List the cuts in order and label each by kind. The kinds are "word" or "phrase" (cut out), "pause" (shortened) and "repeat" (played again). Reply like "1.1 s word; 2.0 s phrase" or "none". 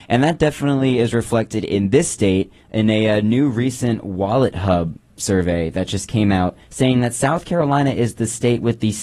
2.6 s pause; 6.6 s pause